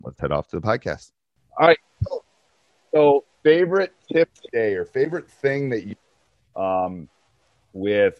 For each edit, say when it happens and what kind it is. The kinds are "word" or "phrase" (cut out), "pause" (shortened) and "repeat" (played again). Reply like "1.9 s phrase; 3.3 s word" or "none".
3.3 s pause; 6.5 s word